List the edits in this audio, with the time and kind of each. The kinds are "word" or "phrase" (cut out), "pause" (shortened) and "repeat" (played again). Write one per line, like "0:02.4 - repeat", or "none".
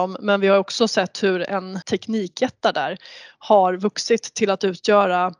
0:01.8 - word